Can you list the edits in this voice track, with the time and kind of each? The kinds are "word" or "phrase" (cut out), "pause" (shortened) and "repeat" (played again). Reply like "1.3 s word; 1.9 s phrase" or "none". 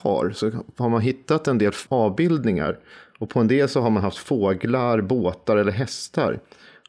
1.9 s word